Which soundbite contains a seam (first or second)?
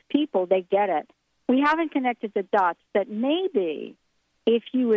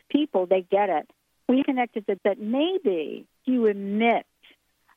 second